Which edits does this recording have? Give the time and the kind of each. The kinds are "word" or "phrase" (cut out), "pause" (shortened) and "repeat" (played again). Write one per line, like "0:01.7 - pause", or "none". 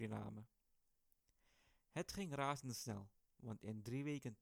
none